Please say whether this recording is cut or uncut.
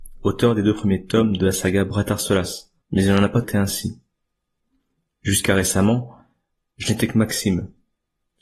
cut